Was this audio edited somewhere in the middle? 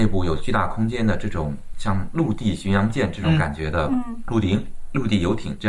yes; 1 cut; at 1.7 s

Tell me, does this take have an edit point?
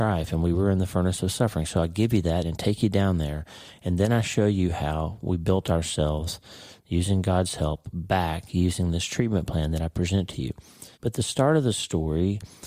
yes; 1 cut; at 10.9 s

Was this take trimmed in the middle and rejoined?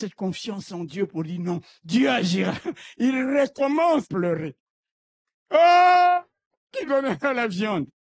yes; 2 cuts; at 4.0 s, 6.8 s

